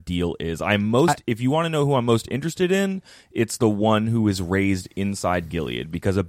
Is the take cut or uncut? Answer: uncut